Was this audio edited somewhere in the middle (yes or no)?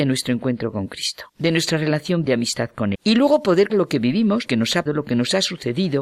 yes